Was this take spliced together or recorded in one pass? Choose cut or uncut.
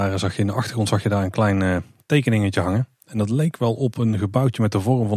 uncut